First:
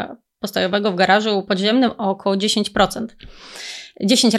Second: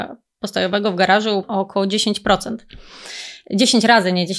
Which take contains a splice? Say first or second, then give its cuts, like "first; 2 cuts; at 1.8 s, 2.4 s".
second; 1 cut; at 1.4 s